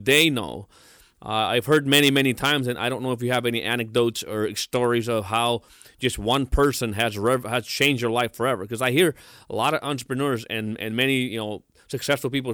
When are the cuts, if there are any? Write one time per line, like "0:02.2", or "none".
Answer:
none